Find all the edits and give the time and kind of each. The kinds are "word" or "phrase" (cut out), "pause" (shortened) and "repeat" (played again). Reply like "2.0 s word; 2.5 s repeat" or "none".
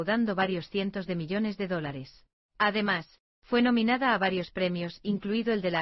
2.3 s pause

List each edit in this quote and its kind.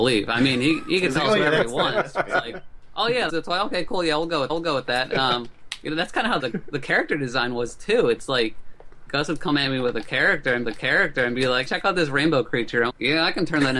3.3 s word; 4.5 s repeat; 6.4 s word; 9.1 s word; 10.6 s repeat; 11.7 s word; 12.9 s word

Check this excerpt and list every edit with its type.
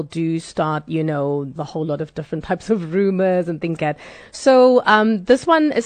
1.6 s phrase; 3.8 s word

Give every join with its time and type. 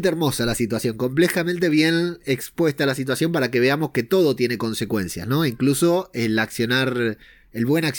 none

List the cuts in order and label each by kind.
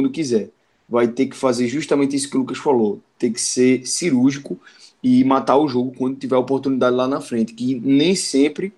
none

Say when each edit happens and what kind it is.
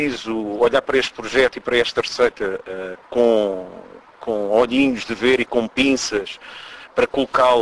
none

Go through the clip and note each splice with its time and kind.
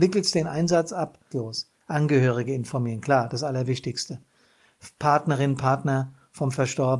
1.3 s phrase

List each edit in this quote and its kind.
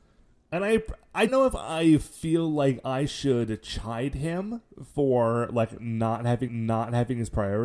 1.3 s word; 6.5 s repeat

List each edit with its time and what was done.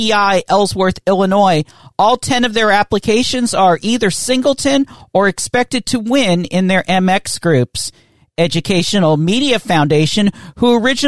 none

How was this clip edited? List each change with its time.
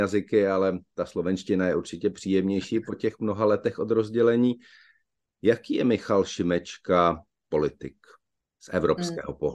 none

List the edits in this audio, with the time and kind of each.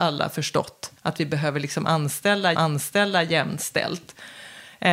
1.0 s pause; 2.5 s repeat

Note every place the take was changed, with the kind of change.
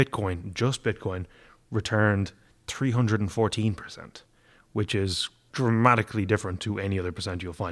5.5 s word

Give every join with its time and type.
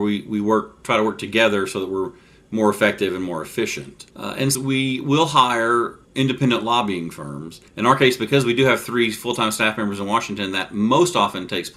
4.1 s pause; 4.5 s word; 6.0 s pause; 7.7 s pause

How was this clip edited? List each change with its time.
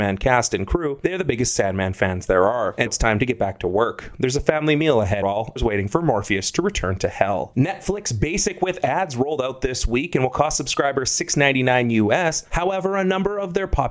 2.9 s word; 5.2 s word; 5.6 s phrase

